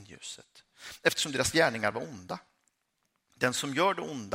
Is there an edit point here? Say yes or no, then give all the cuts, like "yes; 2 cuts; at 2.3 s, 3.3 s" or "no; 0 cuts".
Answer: no; 0 cuts